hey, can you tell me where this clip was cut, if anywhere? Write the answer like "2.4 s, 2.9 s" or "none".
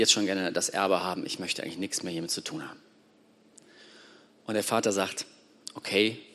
none

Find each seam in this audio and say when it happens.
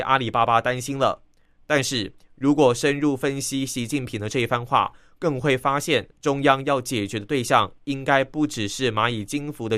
none

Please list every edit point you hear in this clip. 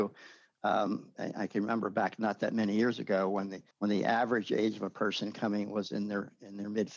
3.7 s

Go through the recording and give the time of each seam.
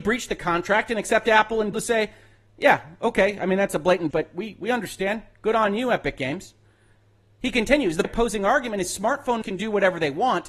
1.7 s, 4.1 s, 8.0 s, 9.4 s

